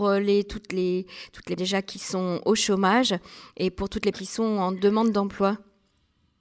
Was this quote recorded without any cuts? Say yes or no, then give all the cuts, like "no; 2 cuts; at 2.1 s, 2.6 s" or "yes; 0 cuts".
no; 2 cuts; at 1.6 s, 4.1 s